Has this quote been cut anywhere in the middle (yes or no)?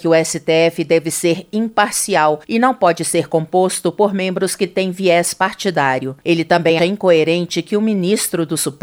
yes